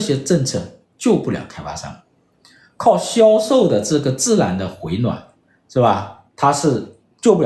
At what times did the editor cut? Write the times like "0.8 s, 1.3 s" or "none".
none